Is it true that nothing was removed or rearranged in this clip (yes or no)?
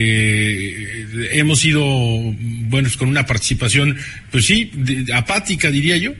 yes